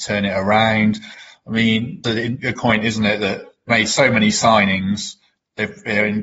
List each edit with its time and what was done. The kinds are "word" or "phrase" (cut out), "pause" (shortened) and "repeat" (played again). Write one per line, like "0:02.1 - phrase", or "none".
0:02.0 - word
0:02.5 - word
0:03.7 - word